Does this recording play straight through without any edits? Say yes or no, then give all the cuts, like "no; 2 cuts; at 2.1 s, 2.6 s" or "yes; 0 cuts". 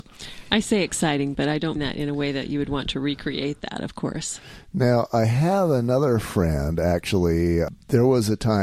no; 1 cut; at 1.8 s